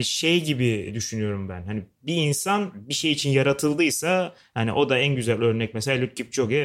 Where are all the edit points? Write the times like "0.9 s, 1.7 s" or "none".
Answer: none